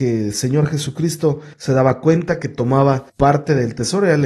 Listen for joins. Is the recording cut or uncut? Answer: cut